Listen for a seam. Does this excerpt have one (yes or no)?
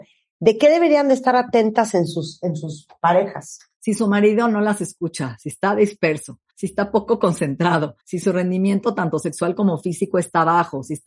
yes